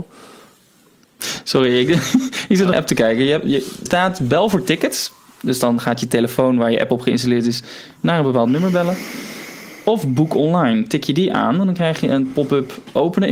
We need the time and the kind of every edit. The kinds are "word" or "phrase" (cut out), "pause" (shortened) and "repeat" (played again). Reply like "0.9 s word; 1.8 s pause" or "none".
2.7 s phrase; 3.9 s word